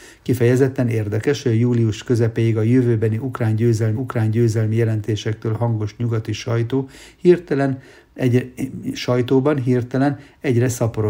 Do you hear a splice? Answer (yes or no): yes